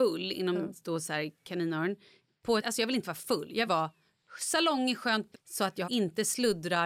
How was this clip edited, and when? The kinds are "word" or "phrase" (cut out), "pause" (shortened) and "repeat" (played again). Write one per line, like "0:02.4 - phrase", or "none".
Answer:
0:02.6 - word
0:03.7 - word
0:05.3 - word
0:05.8 - word